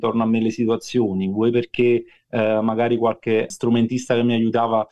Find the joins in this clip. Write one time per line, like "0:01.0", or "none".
none